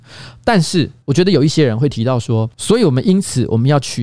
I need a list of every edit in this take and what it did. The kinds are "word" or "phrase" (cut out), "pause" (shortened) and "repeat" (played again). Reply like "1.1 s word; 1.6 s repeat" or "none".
1.0 s pause